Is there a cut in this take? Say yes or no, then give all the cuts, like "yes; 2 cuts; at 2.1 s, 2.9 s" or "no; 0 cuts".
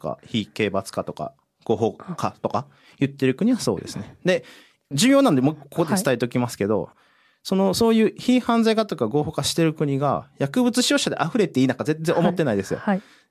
no; 0 cuts